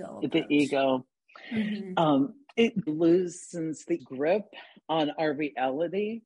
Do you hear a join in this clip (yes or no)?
yes